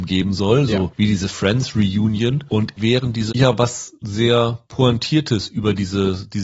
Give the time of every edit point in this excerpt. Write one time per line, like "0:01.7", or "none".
0:02.8
0:03.3